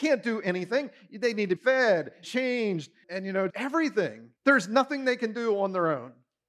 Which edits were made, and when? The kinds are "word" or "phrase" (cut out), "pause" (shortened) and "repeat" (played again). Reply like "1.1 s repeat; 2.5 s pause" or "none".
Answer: 1.6 s word; 2.2 s word; 3.0 s word; 3.5 s word; 4.4 s pause